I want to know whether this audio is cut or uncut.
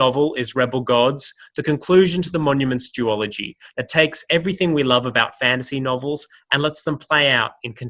uncut